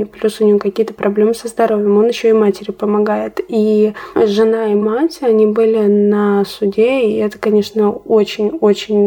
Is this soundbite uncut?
yes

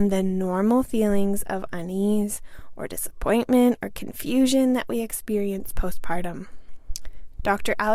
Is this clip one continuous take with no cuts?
yes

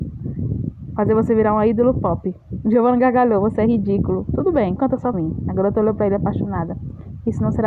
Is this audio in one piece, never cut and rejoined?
no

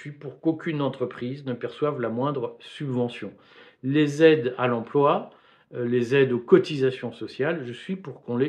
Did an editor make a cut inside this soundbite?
no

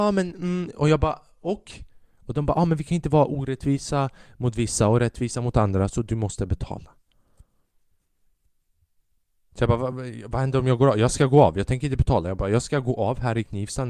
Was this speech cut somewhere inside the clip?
no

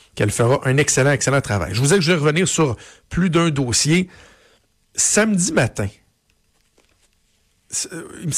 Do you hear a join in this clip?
no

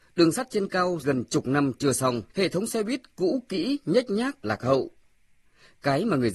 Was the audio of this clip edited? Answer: yes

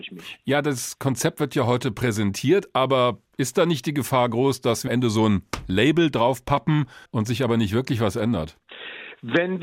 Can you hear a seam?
yes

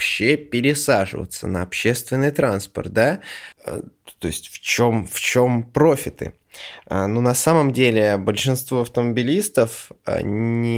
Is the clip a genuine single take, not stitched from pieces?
no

